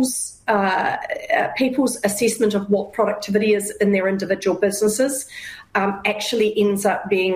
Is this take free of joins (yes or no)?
yes